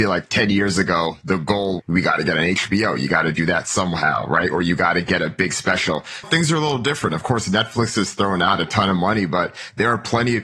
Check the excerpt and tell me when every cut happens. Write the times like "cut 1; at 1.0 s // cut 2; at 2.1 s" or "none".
cut 1; at 1.8 s // cut 2; at 6.2 s